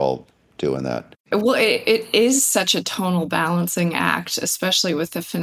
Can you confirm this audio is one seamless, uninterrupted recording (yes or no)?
no